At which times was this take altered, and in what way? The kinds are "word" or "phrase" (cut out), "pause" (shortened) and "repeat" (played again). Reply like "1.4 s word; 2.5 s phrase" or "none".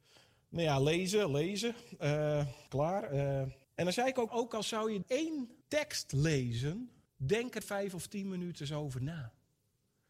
2.7 s pause; 3.6 s pause; 4.3 s phrase; 5.0 s phrase; 5.6 s pause; 7.1 s pause; 7.6 s phrase